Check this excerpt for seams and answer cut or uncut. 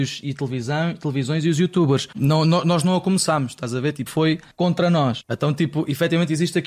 cut